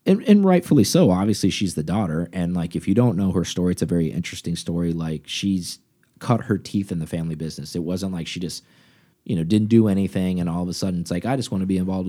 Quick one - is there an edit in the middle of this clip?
no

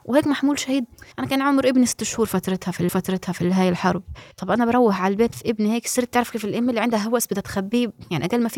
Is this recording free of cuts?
no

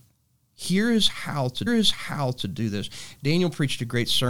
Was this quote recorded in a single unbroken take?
no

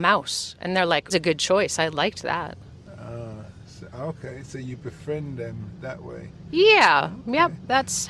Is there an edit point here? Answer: yes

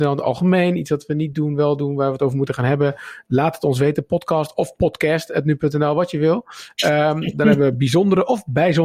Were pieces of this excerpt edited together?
no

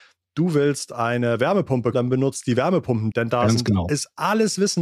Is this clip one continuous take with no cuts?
no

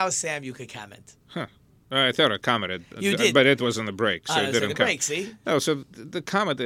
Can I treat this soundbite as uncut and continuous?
no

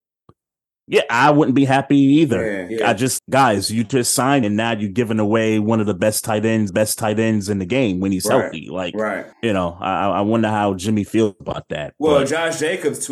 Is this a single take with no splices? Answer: no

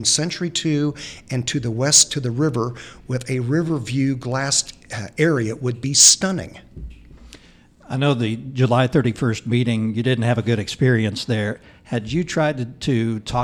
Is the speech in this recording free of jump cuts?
yes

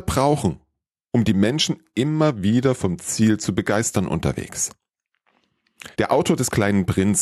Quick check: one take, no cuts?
no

